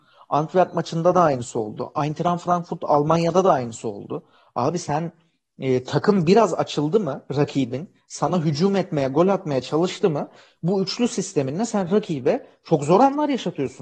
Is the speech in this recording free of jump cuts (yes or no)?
yes